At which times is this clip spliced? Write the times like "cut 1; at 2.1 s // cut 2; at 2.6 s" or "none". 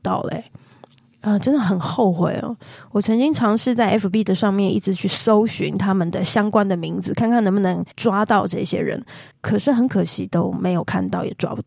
cut 1; at 7.9 s // cut 2; at 9.3 s